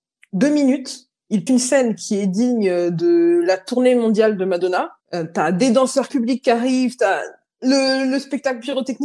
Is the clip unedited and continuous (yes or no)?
no